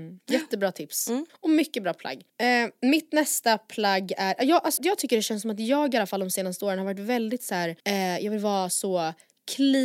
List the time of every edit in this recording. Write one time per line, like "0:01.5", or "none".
0:01.3
0:02.3
0:04.8
0:07.8